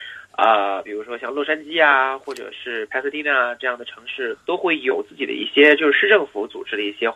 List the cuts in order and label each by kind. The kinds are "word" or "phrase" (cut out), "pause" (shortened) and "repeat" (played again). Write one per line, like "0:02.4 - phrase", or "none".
0:04.4 - pause